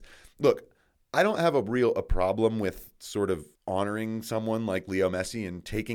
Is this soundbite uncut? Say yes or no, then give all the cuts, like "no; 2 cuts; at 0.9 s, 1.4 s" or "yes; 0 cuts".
no; 1 cut; at 3.5 s